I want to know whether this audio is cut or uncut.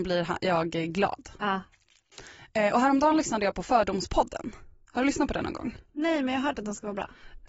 uncut